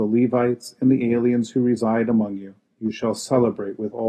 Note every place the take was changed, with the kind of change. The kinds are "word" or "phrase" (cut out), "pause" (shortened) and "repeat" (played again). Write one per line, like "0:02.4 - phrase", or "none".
none